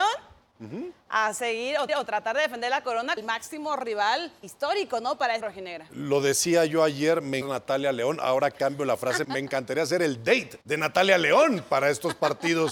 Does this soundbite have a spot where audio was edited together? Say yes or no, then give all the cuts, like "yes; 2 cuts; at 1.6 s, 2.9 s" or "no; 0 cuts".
yes; 7 cuts; at 1.9 s, 3.2 s, 4.4 s, 5.4 s, 7.4 s, 9.2 s, 10.6 s